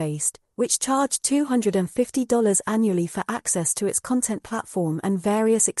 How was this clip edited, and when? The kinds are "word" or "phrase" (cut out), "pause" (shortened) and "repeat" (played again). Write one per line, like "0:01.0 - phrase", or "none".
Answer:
none